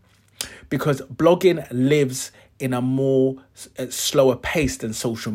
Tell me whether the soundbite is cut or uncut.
uncut